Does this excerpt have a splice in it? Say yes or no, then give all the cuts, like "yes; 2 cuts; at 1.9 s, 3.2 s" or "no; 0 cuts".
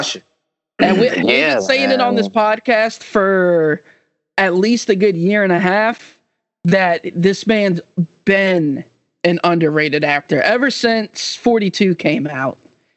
no; 0 cuts